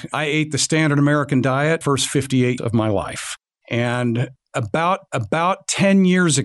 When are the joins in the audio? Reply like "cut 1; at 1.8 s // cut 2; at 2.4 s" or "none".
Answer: cut 1; at 1.8 s // cut 2; at 2.6 s // cut 3; at 5.1 s